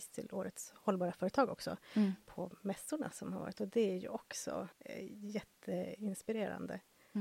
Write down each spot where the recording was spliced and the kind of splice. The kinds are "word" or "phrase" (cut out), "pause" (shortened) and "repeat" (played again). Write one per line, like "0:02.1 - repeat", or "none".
0:04.7 - pause